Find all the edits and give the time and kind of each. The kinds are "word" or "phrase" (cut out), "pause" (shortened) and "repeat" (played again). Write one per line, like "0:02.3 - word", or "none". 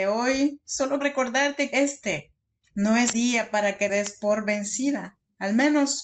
0:01.0 - word
0:01.7 - word
0:03.1 - word
0:03.9 - word